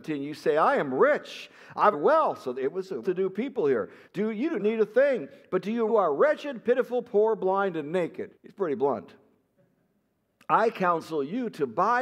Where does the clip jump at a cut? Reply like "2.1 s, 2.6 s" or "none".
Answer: 1.9 s, 3.0 s, 4.1 s, 4.6 s, 5.9 s, 8.3 s